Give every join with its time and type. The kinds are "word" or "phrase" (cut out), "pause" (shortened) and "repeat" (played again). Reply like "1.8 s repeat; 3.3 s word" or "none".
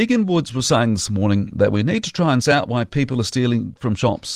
2.4 s word